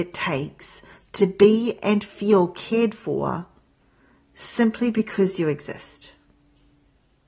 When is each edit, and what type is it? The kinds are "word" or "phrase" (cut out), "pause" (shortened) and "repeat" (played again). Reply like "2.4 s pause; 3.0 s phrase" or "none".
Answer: none